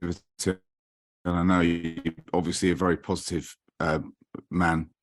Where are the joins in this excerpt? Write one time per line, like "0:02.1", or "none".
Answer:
0:02.2